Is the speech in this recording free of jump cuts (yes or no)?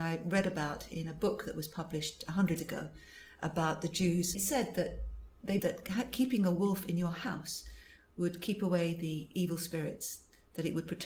no